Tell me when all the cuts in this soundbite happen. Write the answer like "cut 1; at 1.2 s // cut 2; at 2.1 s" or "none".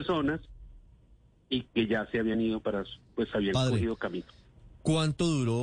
none